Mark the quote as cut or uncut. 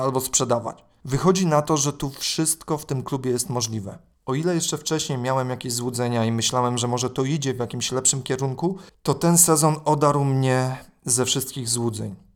uncut